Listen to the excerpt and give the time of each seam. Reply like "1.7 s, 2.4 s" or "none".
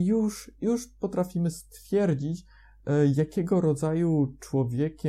none